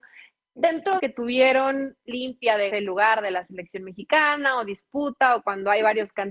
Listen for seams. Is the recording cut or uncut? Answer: cut